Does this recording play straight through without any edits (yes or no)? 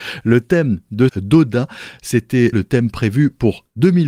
no